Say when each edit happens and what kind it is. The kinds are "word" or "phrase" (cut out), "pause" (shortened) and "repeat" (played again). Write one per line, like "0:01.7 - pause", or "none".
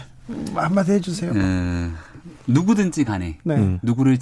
none